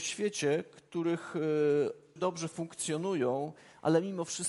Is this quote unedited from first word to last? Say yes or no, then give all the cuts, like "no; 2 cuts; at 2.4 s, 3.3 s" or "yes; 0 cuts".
no; 1 cut; at 2.2 s